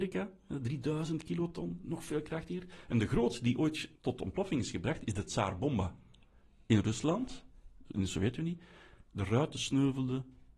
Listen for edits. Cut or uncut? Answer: cut